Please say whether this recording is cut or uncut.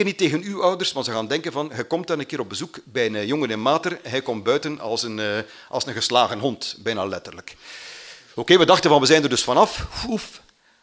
uncut